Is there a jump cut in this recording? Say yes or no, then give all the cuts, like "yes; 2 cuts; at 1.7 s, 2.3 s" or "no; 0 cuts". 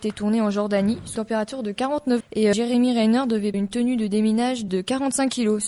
yes; 5 cuts; at 1.2 s, 2.2 s, 2.5 s, 3.5 s, 4.7 s